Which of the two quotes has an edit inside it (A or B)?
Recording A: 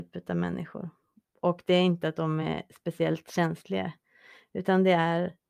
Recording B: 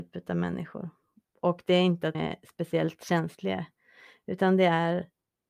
B